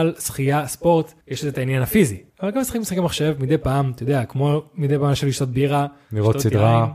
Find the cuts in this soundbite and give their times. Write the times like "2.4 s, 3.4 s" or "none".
1.2 s, 2.3 s